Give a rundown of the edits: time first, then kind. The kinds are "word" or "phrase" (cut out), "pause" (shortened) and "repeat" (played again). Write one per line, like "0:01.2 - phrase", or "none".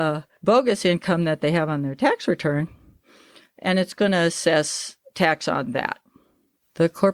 none